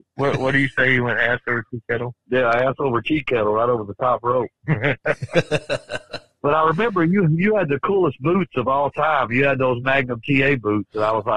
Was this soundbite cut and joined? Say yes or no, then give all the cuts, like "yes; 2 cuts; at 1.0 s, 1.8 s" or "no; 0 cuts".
no; 0 cuts